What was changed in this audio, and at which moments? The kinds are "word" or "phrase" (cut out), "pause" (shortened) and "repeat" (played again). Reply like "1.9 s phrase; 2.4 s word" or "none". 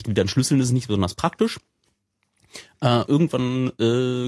3.1 s word

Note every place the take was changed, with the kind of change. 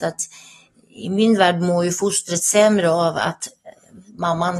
none

